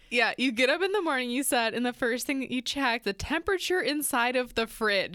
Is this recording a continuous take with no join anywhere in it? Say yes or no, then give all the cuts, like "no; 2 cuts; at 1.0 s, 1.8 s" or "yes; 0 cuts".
no; 1 cut; at 3.0 s